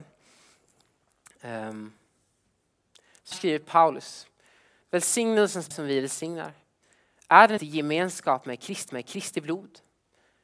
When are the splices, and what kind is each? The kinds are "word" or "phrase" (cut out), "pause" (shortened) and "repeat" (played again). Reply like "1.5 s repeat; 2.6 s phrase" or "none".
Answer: 3.3 s word; 5.7 s word; 7.6 s word; 8.9 s repeat